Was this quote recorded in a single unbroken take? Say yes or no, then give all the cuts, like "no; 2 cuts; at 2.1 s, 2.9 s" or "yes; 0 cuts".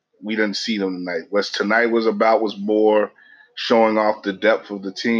yes; 0 cuts